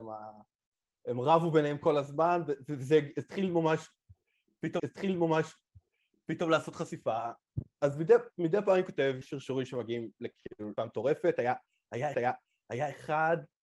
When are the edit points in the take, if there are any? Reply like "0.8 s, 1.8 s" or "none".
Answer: 4.8 s, 9.2 s, 10.8 s, 12.1 s